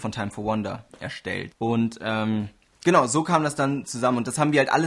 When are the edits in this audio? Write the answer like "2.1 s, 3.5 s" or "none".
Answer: none